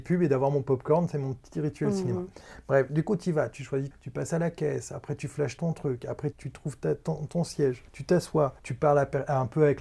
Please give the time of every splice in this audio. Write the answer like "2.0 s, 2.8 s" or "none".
3.9 s, 5.6 s, 6.3 s, 7.9 s, 8.6 s